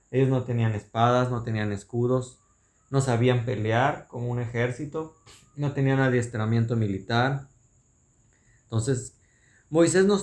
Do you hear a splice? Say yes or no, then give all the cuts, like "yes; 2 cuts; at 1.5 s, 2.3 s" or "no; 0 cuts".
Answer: no; 0 cuts